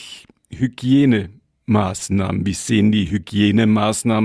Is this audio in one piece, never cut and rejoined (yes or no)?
yes